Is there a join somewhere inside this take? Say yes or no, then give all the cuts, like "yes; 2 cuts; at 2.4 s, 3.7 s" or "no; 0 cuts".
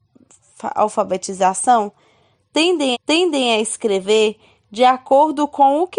yes; 1 cut; at 2.9 s